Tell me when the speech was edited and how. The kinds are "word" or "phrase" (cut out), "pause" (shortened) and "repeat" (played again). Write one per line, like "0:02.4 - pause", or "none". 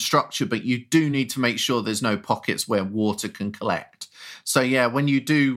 none